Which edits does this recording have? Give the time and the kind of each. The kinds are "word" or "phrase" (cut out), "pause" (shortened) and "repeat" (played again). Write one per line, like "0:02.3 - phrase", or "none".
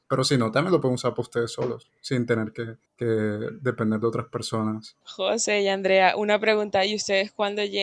0:02.9 - pause
0:05.0 - pause